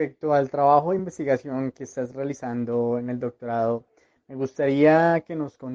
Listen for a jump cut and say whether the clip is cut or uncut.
uncut